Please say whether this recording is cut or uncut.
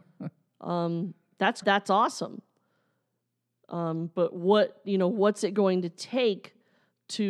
cut